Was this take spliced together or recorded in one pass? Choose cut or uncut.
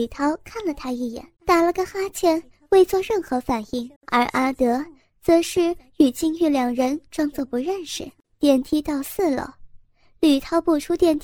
cut